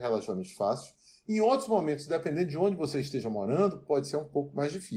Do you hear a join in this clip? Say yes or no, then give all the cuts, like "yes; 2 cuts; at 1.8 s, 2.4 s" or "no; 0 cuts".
no; 0 cuts